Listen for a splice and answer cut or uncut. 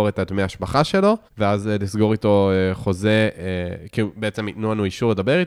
cut